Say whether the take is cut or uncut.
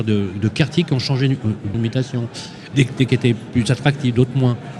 cut